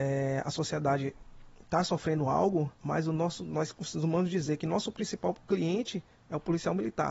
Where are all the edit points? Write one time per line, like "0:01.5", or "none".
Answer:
0:02.7